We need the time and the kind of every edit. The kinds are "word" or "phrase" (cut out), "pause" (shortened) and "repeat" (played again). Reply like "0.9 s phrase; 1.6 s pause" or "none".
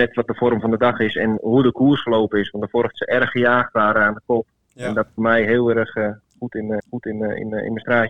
1.4 s word; 2.9 s phrase; 5.2 s phrase; 6.8 s repeat